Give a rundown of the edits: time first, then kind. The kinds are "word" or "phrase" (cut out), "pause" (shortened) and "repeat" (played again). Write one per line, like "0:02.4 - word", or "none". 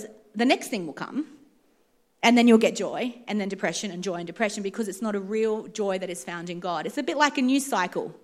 none